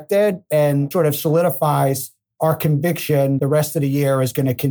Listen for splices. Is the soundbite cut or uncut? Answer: cut